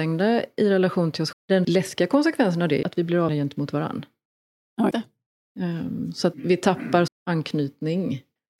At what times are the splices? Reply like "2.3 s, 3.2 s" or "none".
1.3 s, 1.6 s, 2.8 s, 3.3 s, 4.9 s, 6.3 s, 7.1 s

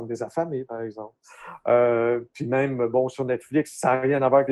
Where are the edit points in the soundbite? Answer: none

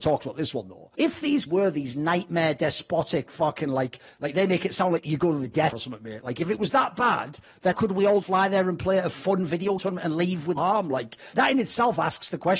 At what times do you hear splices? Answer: 0.9 s, 1.5 s, 3.3 s, 5.7 s, 7.7 s, 8.2 s, 9.8 s, 10.6 s, 11.3 s

